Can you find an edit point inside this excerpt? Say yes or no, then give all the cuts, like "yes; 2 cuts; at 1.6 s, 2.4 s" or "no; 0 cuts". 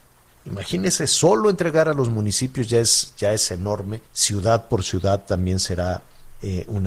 yes; 1 cut; at 4.0 s